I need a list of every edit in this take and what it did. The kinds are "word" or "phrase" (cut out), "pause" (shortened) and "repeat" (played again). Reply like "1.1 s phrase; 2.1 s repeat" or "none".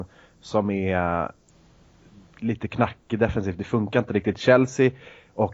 none

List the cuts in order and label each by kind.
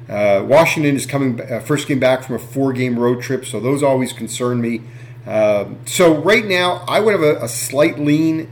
none

